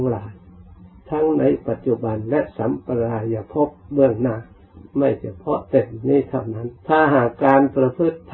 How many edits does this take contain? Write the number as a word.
two